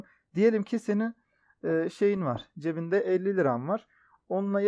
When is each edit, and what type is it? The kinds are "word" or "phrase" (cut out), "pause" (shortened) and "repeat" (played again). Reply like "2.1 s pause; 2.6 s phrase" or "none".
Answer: none